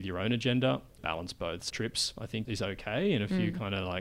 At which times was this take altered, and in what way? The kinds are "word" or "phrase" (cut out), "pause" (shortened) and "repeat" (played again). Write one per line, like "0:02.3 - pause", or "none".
0:01.0 - phrase
0:01.7 - phrase
0:02.4 - word